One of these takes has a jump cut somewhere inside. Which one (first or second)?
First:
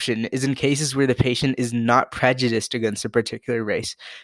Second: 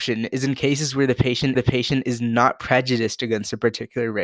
second